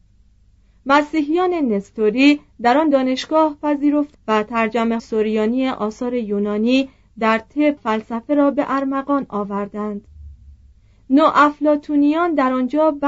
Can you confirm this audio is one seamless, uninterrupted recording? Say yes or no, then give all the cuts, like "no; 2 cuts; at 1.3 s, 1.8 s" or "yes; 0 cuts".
no; 3 cuts; at 4.1 s, 5.0 s, 7.8 s